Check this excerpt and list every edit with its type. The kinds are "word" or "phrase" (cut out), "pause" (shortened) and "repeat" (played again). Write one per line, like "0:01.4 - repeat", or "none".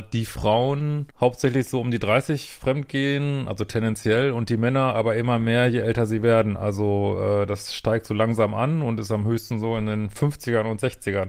0:01.1 - pause